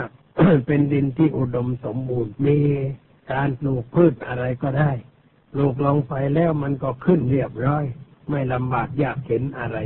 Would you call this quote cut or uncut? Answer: cut